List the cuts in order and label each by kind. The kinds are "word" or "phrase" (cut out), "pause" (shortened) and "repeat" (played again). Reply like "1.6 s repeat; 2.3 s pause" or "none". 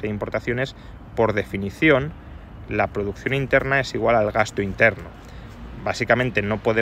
none